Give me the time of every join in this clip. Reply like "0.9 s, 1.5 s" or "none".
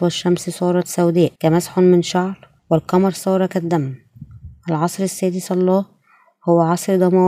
1.4 s, 2.6 s